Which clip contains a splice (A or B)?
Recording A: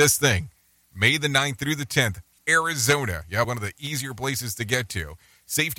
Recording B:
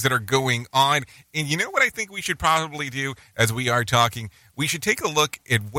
A